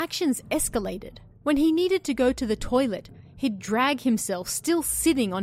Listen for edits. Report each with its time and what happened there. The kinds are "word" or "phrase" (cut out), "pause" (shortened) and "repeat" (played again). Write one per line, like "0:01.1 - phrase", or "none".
0:01.3 - pause